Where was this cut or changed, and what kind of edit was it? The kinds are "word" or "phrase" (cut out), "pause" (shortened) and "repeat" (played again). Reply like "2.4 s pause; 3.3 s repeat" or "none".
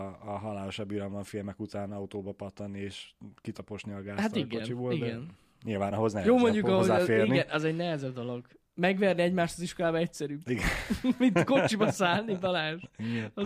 none